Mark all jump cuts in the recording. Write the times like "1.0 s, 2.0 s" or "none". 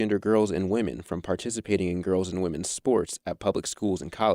none